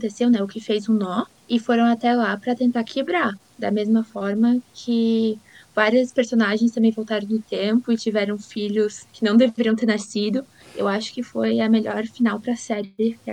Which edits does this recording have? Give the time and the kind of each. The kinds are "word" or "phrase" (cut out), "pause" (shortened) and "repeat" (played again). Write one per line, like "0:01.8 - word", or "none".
none